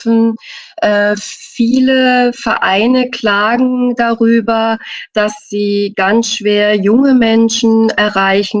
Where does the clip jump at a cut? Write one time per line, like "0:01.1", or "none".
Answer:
none